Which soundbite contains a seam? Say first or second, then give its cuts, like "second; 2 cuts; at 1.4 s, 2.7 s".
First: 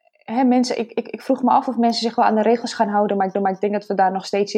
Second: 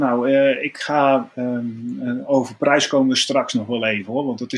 first; 1 cut; at 3.3 s